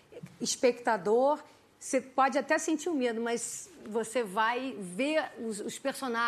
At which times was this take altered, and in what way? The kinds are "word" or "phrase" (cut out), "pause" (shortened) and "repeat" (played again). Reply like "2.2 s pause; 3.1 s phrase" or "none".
none